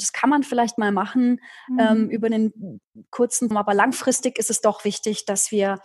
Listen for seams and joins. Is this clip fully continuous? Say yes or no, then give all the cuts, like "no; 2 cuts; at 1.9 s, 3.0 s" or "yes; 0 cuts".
no; 1 cut; at 3.5 s